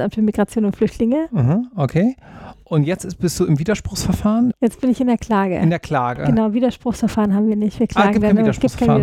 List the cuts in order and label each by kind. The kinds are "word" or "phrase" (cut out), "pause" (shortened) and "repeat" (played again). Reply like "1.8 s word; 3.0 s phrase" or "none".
none